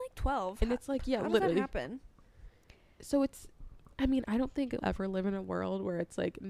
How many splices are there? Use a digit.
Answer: 1